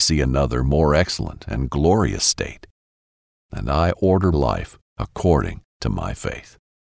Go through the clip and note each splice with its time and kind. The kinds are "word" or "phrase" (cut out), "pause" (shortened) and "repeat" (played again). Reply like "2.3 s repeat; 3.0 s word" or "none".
4.3 s word